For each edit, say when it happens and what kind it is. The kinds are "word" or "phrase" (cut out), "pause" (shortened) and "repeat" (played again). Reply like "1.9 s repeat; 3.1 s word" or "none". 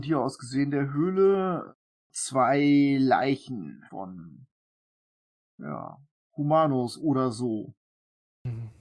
3.9 s pause